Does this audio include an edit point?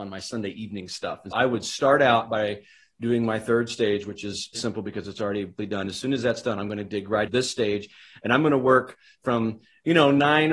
yes; 4 cuts; at 1.3 s, 4.5 s, 5.6 s, 7.3 s

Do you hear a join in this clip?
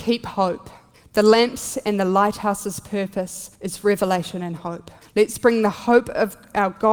yes; 3 cuts; at 0.9 s, 3.5 s, 5.0 s

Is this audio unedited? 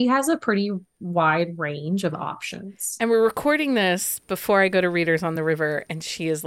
yes; 0 cuts

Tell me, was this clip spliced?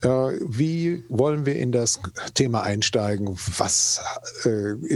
no; 0 cuts

